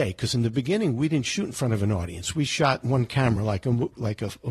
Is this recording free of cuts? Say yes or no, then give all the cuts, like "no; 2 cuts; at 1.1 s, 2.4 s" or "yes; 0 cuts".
yes; 0 cuts